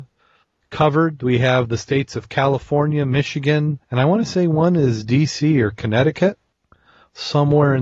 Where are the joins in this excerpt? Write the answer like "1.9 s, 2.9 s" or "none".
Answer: 3.8 s